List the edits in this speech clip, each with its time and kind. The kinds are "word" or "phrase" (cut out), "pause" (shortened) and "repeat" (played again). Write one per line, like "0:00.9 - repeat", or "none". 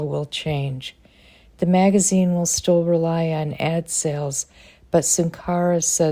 none